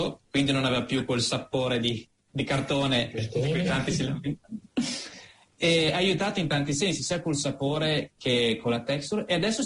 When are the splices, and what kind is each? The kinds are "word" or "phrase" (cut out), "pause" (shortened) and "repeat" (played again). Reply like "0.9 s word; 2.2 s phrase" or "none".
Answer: none